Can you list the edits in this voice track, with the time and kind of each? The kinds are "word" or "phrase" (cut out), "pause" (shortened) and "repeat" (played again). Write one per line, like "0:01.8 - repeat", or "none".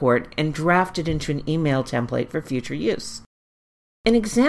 none